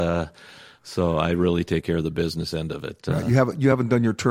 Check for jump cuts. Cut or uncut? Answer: uncut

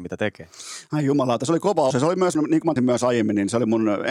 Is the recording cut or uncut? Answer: cut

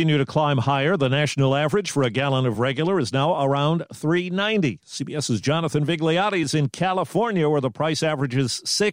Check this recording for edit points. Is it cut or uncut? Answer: uncut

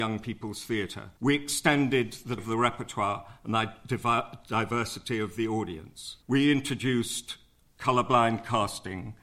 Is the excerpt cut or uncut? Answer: cut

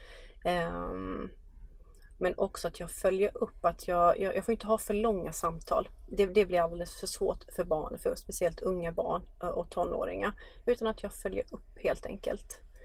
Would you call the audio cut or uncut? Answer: uncut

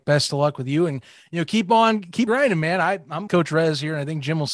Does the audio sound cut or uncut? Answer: cut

